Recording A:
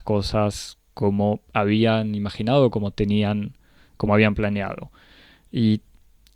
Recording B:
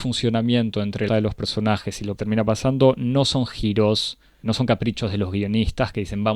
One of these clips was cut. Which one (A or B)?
B